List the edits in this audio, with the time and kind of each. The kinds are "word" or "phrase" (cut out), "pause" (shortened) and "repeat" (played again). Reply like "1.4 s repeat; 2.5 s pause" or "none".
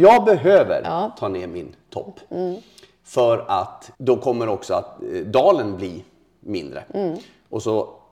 3.9 s pause

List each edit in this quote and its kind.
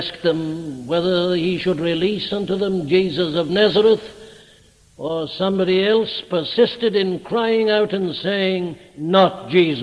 none

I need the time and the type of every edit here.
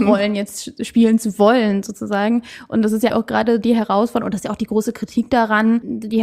3.1 s word

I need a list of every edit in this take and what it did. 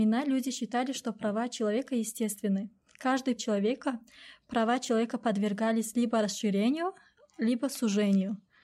3.4 s phrase

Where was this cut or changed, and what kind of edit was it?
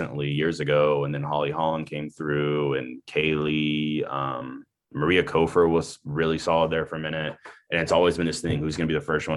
none

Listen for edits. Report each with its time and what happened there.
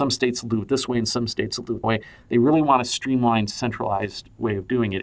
1.8 s word

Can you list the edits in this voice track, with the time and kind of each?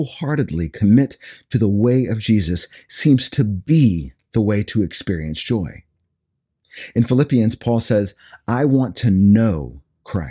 none

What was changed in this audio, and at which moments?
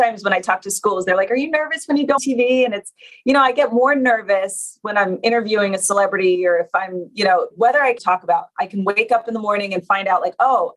2.2 s word; 8.0 s word

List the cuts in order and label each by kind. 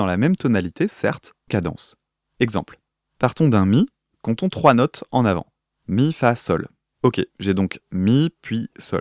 1.5 s phrase

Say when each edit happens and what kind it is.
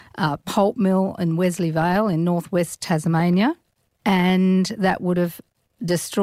none

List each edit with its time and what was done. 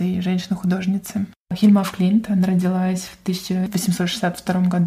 none

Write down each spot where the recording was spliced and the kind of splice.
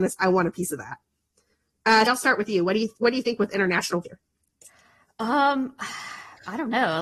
2.1 s word; 4.0 s word

